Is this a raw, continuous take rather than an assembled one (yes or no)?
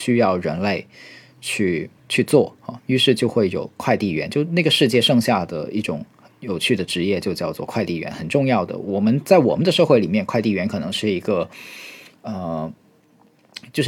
no